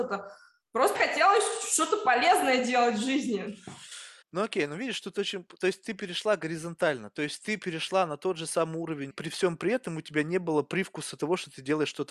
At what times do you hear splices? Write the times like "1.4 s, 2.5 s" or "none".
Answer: 0.9 s, 4.2 s, 9.1 s